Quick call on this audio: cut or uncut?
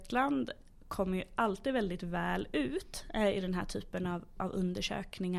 uncut